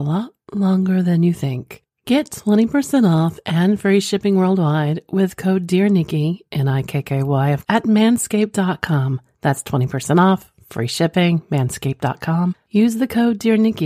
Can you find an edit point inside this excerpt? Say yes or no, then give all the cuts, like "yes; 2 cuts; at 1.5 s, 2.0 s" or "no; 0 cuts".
yes; 1 cut; at 7.6 s